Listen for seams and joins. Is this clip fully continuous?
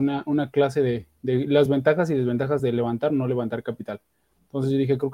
yes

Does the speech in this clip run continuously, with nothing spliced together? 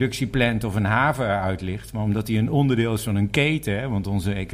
yes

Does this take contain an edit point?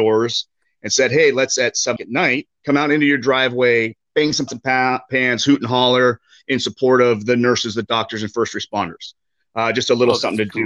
yes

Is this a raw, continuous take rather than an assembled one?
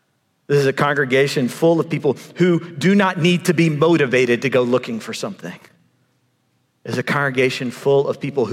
yes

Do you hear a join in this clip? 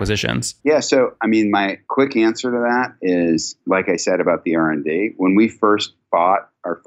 no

